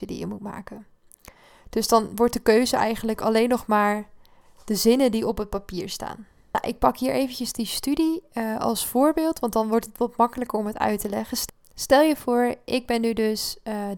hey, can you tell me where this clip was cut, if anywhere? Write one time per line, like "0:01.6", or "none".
none